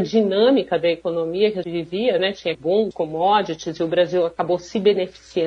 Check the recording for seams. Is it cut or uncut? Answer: cut